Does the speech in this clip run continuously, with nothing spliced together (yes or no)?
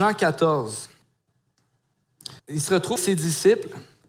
no